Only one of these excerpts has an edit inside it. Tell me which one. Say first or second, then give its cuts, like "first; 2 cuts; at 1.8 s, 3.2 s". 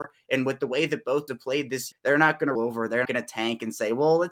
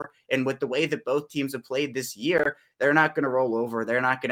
first; 4 cuts; at 1.3 s, 1.9 s, 2.6 s, 3.1 s